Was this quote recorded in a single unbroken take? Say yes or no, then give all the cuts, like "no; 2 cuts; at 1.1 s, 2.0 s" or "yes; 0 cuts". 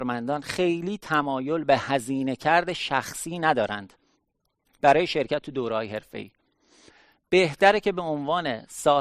yes; 0 cuts